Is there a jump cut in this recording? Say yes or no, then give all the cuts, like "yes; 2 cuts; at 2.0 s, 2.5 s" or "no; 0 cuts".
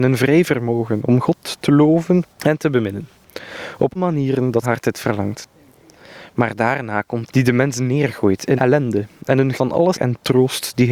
yes; 7 cuts; at 2.3 s, 4.0 s, 4.6 s, 7.3 s, 8.6 s, 9.5 s, 9.9 s